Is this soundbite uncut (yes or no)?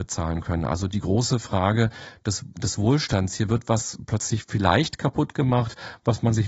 yes